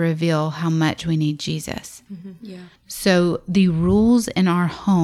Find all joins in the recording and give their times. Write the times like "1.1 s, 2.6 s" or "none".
2.8 s